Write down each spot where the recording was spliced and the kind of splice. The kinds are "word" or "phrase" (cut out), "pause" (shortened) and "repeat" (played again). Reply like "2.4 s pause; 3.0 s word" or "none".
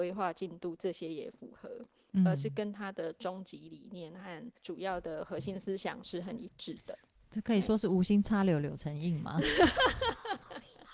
4.6 s pause